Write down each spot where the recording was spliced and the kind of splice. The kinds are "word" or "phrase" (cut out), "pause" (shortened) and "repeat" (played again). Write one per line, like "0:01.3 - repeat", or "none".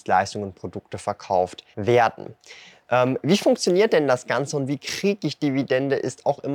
0:01.7 - pause